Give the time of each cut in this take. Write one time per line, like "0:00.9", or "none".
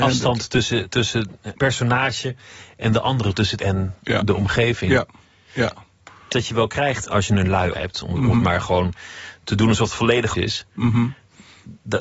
0:01.6
0:03.6
0:06.3
0:07.0
0:07.7
0:10.3